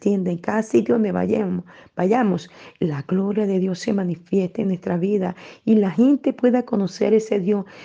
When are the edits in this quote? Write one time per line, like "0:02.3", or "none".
none